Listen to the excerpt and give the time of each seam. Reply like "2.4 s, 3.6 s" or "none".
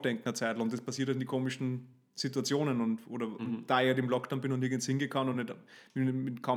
none